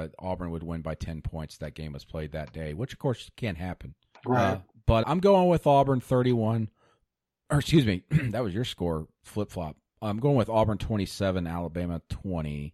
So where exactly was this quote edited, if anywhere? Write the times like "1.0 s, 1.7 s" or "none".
4.2 s, 5.0 s